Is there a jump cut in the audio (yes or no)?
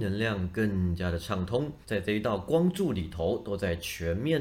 yes